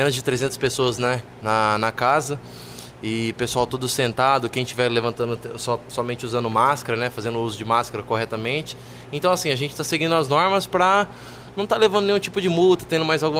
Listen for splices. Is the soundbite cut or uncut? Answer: uncut